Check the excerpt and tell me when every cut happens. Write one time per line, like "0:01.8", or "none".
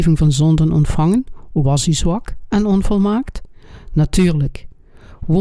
0:01.6